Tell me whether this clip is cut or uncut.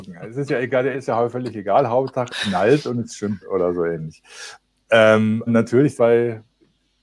cut